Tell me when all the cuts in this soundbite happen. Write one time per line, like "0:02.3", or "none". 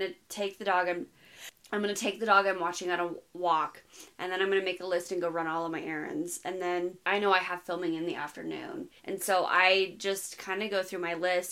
0:07.0
0:09.0